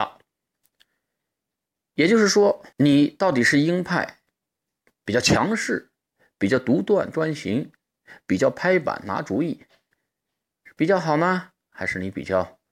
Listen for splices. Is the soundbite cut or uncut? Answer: cut